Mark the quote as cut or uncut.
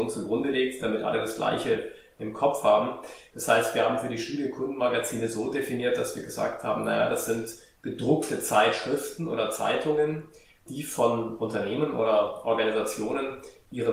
uncut